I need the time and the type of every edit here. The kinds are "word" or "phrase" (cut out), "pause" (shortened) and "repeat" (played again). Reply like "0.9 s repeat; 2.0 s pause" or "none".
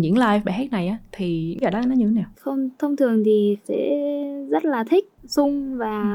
1.6 s phrase; 2.3 s word; 3.6 s phrase